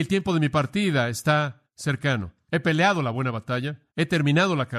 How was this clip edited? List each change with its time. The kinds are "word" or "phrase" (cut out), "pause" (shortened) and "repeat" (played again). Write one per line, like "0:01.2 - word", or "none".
0:01.7 - pause
0:03.9 - pause